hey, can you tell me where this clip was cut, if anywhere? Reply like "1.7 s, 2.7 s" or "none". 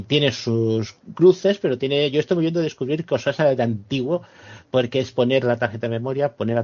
none